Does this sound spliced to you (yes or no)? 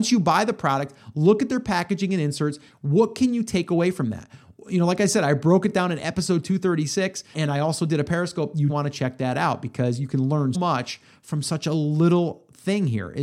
yes